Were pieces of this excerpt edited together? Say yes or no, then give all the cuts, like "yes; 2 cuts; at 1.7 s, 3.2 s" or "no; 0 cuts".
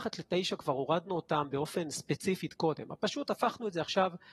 no; 0 cuts